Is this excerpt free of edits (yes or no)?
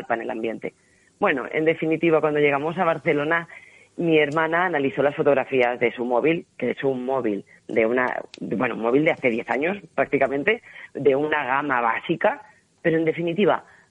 yes